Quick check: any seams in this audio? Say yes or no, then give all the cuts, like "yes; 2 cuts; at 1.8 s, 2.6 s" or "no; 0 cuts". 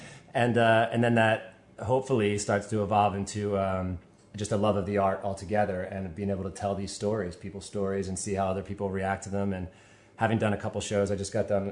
no; 0 cuts